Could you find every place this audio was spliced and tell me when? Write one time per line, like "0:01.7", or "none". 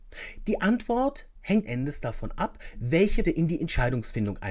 0:01.6
0:03.2